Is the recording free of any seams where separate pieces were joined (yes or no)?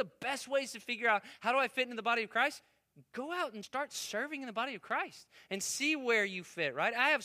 no